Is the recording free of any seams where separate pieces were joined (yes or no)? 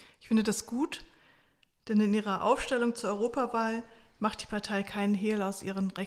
yes